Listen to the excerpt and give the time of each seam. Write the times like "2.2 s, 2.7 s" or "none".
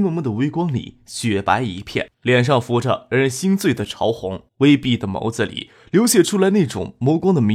2.1 s, 4.5 s